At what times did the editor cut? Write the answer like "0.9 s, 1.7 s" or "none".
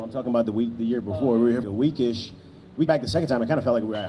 1.6 s, 2.9 s